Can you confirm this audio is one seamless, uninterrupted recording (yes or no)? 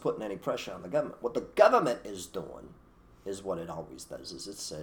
yes